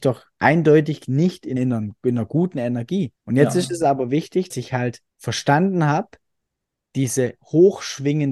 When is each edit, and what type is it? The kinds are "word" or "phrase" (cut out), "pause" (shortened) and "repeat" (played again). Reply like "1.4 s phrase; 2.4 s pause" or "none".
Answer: 1.6 s phrase; 3.2 s pause; 4.5 s word; 5.1 s pause